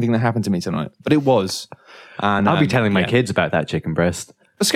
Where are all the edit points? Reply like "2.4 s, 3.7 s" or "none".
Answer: none